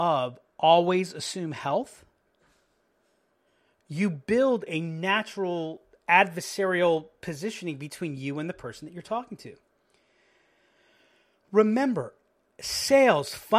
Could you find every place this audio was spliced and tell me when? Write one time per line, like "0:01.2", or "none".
none